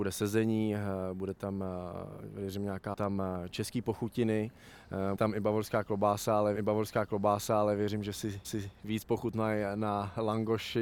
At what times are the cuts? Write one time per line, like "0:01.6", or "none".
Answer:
0:02.9
0:05.1
0:06.5
0:08.4